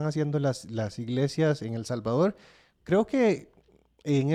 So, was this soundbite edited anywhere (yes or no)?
no